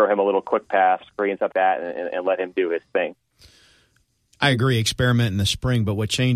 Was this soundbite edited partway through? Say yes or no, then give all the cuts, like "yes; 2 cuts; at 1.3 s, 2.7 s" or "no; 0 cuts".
yes; 2 cuts; at 1.0 s, 1.5 s